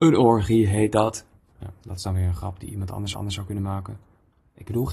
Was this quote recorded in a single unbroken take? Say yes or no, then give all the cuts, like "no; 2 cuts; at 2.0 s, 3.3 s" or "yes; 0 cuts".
no; 1 cut; at 3.1 s